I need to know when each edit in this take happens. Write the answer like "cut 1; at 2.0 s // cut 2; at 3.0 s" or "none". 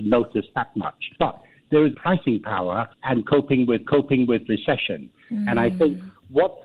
cut 1; at 1.2 s // cut 2; at 1.9 s // cut 3; at 2.9 s // cut 4; at 3.9 s